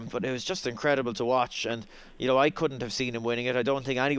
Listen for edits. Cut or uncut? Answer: uncut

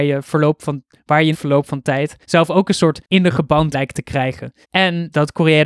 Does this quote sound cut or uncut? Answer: cut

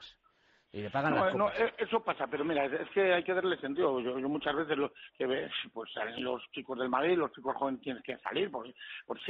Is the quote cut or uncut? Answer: uncut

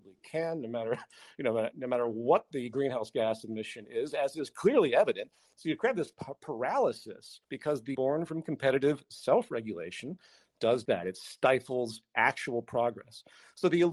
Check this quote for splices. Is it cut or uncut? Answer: cut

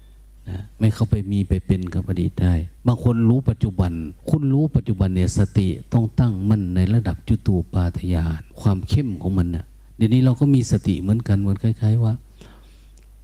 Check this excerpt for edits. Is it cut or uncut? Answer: cut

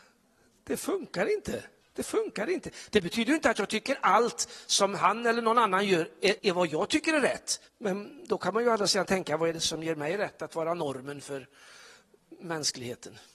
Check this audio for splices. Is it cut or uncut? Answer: cut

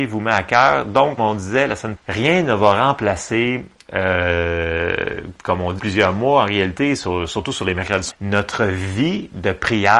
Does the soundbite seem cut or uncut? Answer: cut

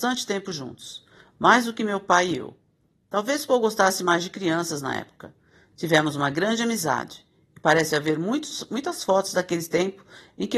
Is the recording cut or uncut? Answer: uncut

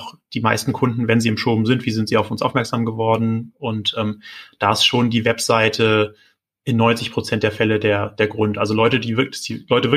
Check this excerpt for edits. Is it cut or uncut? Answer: uncut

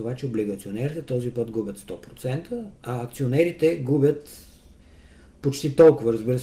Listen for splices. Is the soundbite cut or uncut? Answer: uncut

